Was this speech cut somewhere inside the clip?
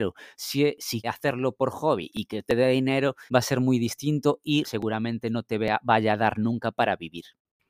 yes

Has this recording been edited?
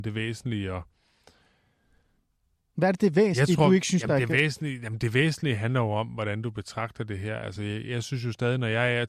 no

